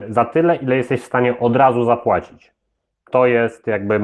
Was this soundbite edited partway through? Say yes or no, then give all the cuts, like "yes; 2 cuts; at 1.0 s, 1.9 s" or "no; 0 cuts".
no; 0 cuts